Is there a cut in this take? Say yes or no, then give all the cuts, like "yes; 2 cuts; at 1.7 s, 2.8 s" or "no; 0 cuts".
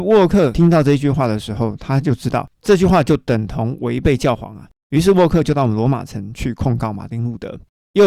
yes; 1 cut; at 2.5 s